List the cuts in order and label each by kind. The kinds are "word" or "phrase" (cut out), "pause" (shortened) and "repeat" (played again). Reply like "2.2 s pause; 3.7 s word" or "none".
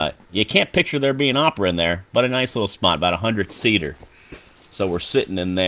none